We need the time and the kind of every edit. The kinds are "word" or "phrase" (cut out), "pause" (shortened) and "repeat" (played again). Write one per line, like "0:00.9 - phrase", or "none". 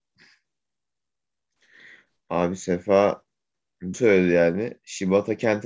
0:03.9 - word